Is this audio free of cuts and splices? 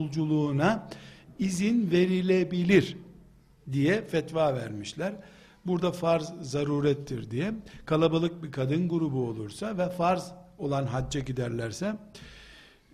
yes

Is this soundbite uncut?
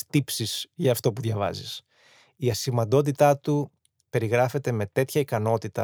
yes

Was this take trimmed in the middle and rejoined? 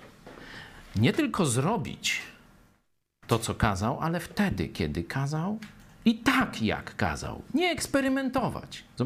no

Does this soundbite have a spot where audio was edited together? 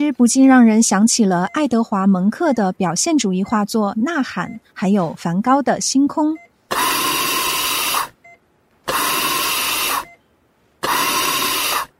no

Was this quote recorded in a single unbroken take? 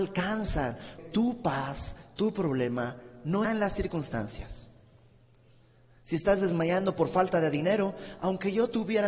no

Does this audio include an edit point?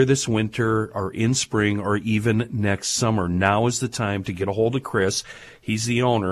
no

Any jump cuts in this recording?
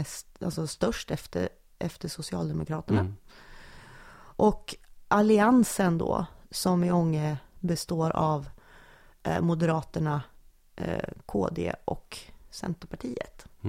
no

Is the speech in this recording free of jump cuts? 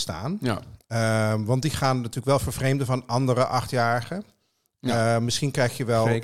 yes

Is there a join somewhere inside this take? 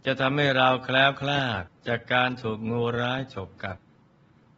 yes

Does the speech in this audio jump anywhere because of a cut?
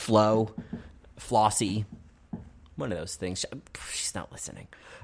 no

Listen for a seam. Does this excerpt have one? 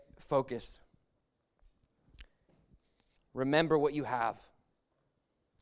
no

